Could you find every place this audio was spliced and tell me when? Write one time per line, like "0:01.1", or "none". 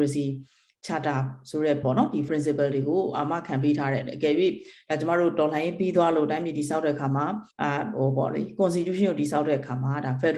0:01.8
0:02.3
0:07.5